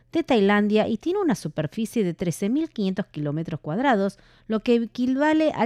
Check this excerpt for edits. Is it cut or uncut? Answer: uncut